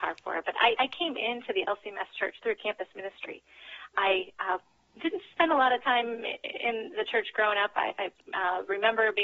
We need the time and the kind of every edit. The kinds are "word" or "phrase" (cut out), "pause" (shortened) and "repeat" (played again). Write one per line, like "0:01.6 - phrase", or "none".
none